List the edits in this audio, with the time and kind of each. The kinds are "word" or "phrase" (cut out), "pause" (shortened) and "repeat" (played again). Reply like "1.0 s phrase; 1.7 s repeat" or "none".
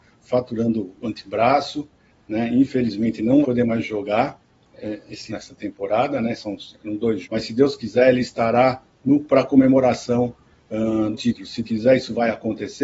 0.9 s word; 3.4 s word; 5.3 s word; 7.2 s word; 9.2 s word; 11.1 s word; 11.6 s word